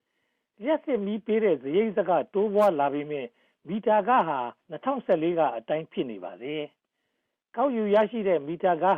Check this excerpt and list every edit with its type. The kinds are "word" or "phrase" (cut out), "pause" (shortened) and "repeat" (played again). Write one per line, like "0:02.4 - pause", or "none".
0:04.6 - pause